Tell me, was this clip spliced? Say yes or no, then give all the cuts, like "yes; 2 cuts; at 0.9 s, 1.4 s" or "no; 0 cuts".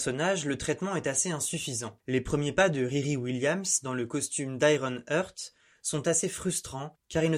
no; 0 cuts